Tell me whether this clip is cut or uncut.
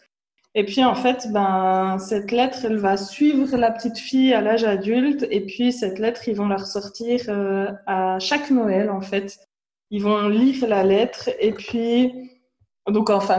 uncut